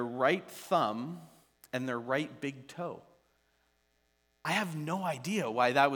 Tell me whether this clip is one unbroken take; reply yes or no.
yes